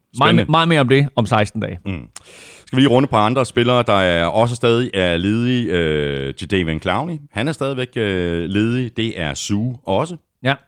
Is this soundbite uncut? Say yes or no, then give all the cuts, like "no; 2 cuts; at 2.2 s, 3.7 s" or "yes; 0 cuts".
yes; 0 cuts